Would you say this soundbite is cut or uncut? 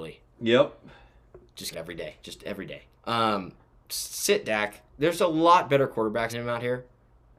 cut